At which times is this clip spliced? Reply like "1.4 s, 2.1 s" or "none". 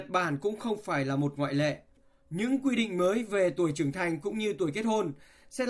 none